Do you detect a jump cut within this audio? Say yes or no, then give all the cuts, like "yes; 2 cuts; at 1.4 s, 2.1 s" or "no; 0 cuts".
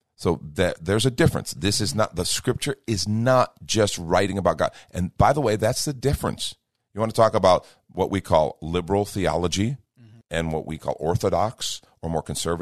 no; 0 cuts